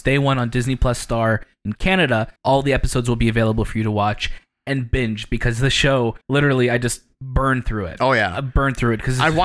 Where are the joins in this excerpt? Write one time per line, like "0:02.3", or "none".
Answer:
0:02.4
0:06.2